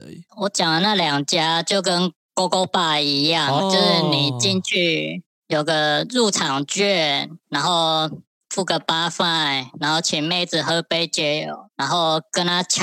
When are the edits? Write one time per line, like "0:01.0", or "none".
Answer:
0:03.6